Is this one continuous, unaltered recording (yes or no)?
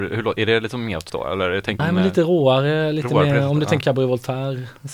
no